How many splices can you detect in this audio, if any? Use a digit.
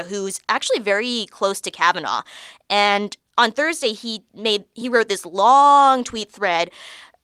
0